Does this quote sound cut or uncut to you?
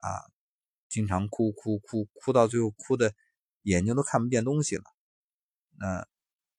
uncut